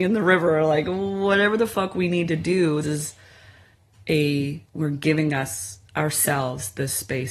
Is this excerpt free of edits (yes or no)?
no